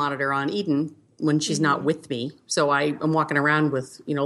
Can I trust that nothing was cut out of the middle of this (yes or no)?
yes